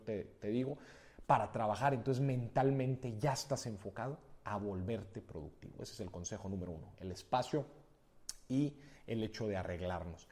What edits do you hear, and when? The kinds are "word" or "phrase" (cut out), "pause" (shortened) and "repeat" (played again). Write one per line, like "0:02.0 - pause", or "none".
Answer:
none